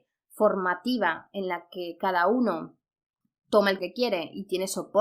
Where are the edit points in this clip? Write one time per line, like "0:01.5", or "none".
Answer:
0:03.8